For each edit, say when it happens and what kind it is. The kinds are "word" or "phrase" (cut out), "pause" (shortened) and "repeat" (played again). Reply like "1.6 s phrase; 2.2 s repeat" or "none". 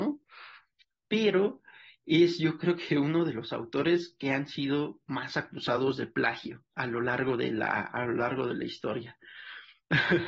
none